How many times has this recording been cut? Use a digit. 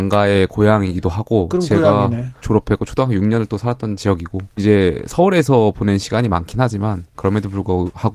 2